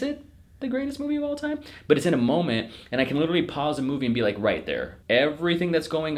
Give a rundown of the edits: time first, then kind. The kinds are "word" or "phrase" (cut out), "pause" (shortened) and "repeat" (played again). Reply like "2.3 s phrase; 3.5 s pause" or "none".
5.0 s pause